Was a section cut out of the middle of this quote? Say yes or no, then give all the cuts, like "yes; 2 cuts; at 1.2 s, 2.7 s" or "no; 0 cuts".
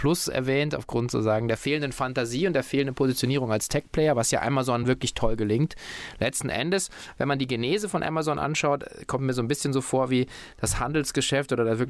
no; 0 cuts